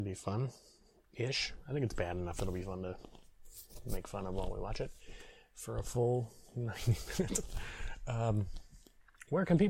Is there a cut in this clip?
no; 0 cuts

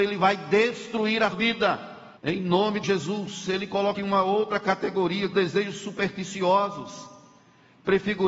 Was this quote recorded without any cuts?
no; 5 cuts; at 1.3 s, 2.2 s, 2.8 s, 3.9 s, 5.3 s

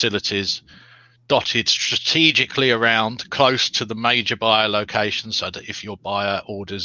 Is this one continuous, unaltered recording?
yes; 0 cuts

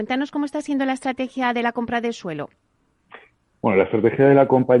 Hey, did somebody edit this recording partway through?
no; 0 cuts

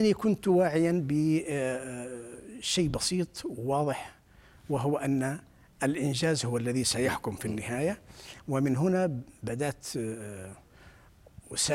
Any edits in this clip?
no; 0 cuts

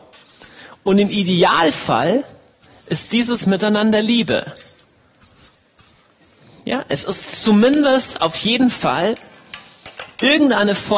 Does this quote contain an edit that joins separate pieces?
no; 0 cuts

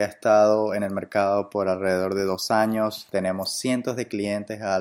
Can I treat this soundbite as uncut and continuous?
yes; 0 cuts

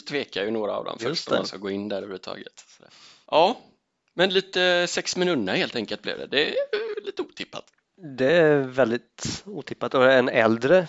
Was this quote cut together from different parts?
no; 0 cuts

